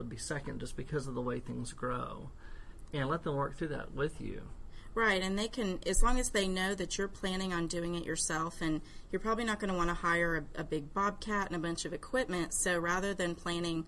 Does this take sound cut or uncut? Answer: uncut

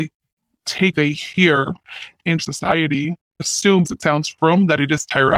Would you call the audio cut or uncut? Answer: cut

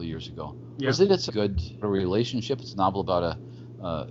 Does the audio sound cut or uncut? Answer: cut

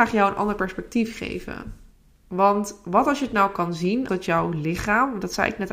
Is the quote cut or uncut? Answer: cut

